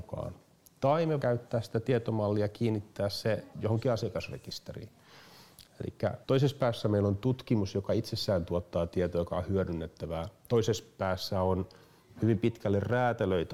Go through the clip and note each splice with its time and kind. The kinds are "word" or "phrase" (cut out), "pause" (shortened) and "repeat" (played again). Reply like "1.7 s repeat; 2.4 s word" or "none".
1.2 s word; 3.5 s pause; 6.2 s pause